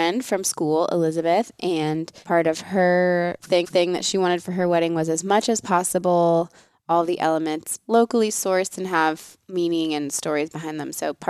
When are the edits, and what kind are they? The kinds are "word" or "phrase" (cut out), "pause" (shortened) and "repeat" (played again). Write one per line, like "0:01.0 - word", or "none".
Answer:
0:03.6 - repeat
0:07.8 - word